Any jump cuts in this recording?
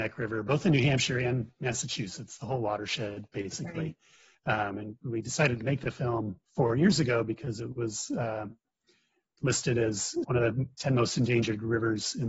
yes; 2 cuts; at 6.4 s, 10.2 s

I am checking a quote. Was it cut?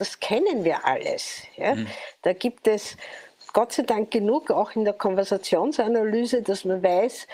no; 0 cuts

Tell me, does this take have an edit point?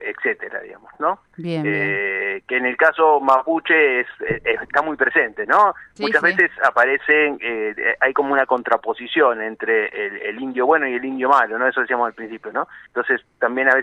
yes; 1 cut; at 12.9 s

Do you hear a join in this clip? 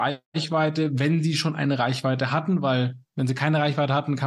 no; 0 cuts

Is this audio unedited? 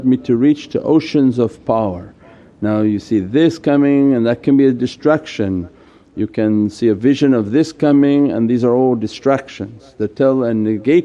yes; 0 cuts

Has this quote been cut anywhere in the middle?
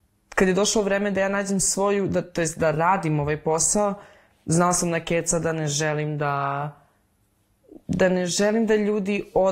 no; 0 cuts

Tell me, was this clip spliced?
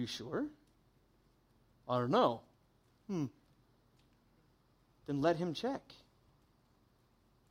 no; 0 cuts

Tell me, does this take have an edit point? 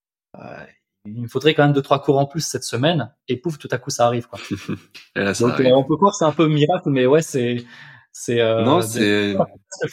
no; 0 cuts

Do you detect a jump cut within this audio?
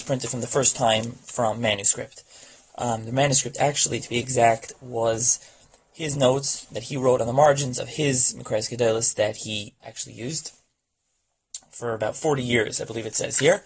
yes; 1 cut; at 9.8 s

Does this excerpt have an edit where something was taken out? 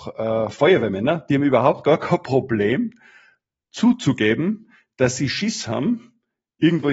no; 0 cuts

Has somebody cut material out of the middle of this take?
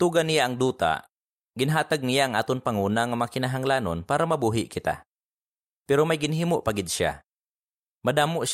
no; 0 cuts

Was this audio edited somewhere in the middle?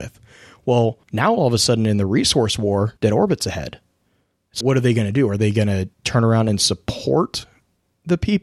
yes; 4 cuts; at 1.0 s, 3.0 s, 4.6 s, 5.9 s

